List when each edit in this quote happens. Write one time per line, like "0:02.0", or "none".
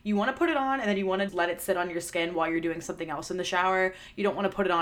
0:01.3

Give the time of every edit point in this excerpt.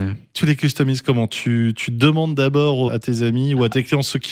0:02.9

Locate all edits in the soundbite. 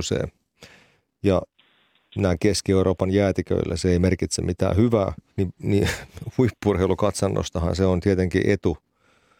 0:05.3

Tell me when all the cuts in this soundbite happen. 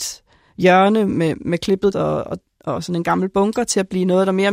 0:01.9

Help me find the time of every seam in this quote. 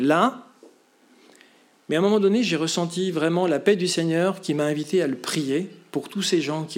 none

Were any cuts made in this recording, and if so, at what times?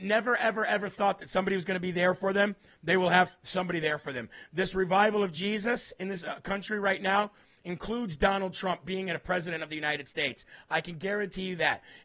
none

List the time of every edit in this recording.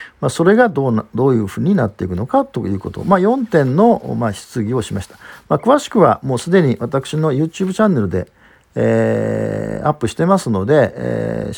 none

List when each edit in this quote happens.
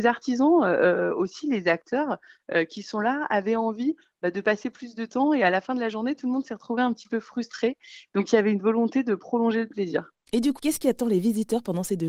0:10.6

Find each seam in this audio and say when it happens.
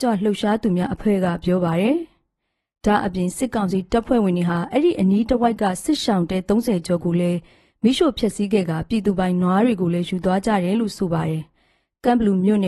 none

